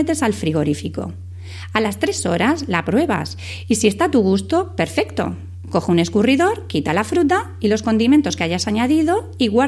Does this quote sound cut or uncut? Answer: uncut